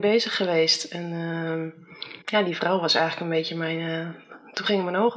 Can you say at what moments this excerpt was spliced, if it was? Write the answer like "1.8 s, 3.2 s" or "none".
2.2 s